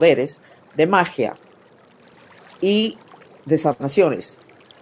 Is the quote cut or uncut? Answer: uncut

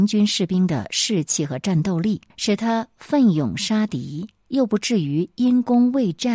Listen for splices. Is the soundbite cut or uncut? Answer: cut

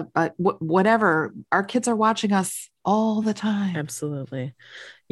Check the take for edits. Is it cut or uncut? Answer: uncut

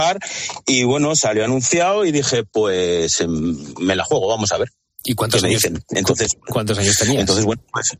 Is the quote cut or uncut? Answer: uncut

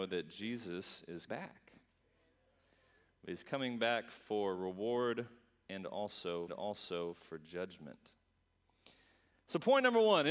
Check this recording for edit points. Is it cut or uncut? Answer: cut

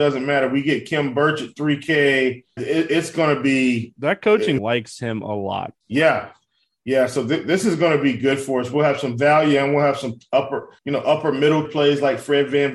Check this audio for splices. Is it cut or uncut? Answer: cut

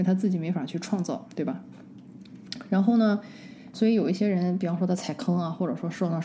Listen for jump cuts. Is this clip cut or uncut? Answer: cut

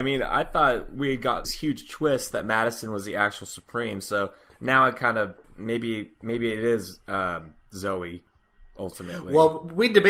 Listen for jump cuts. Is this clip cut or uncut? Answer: cut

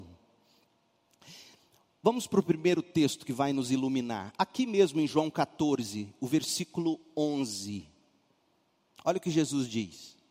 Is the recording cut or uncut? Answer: uncut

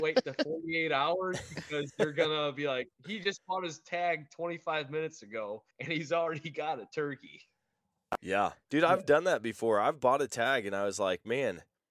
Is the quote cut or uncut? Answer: cut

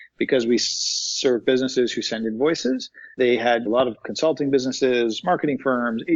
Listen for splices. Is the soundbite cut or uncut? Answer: cut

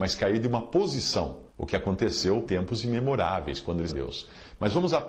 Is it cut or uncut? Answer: cut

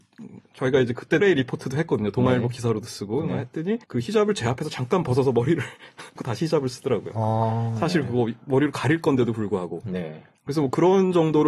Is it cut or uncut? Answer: cut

